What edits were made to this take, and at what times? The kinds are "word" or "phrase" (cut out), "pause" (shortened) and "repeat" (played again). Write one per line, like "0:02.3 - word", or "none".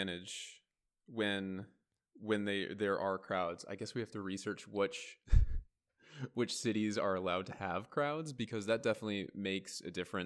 none